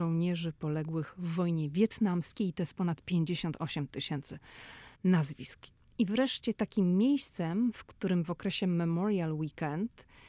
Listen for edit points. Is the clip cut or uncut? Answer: cut